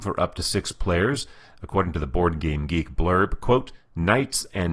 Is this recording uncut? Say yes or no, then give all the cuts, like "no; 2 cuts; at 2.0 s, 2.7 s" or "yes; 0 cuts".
yes; 0 cuts